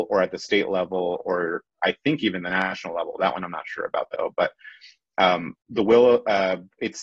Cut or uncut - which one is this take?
cut